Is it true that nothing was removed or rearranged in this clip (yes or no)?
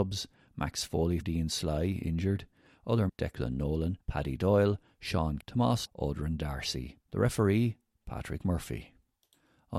no